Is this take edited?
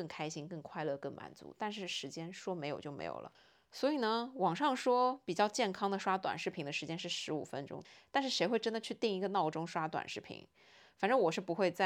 no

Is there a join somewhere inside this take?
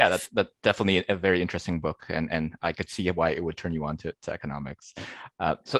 no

